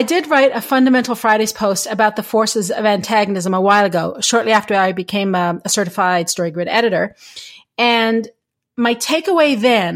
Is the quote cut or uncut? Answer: uncut